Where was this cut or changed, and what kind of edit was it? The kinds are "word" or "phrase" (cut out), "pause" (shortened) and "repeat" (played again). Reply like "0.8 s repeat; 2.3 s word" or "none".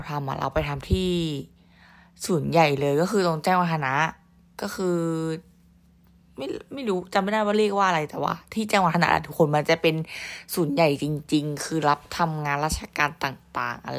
none